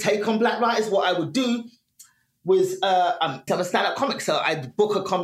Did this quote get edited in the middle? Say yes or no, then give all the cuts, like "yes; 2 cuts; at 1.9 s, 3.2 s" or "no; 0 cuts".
yes; 1 cut; at 3.5 s